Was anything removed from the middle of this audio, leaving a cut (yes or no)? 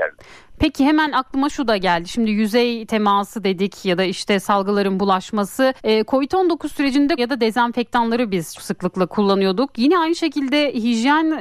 yes